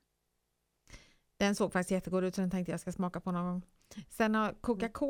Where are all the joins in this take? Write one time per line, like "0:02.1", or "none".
none